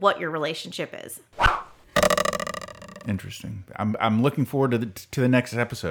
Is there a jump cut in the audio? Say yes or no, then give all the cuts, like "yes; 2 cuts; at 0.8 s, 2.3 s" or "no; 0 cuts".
no; 0 cuts